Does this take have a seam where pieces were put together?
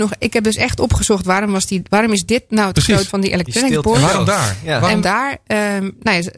yes; 2 cuts; at 3.1 s, 5.0 s

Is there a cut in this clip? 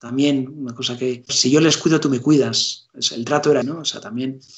yes; 2 cuts; at 1.3 s, 3.6 s

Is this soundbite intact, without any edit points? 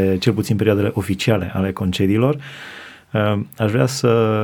yes; 0 cuts

